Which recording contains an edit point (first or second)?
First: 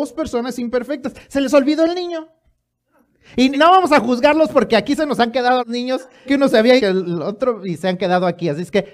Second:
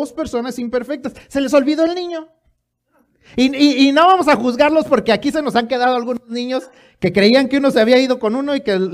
first